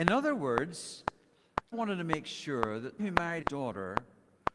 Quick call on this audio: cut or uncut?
cut